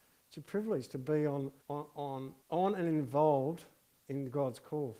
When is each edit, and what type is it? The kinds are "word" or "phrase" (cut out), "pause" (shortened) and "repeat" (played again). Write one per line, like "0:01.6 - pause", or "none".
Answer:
0:01.6 - pause
0:02.4 - pause